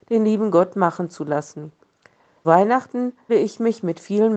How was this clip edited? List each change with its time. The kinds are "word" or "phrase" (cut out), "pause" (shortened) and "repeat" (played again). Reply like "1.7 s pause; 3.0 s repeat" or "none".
2.4 s word; 3.3 s word